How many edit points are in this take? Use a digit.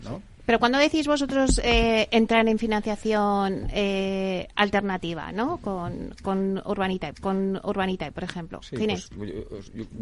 1